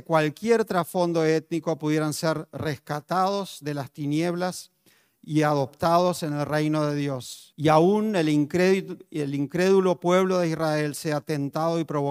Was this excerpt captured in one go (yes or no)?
no